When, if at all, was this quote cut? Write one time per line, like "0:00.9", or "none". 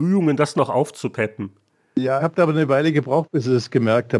0:02.2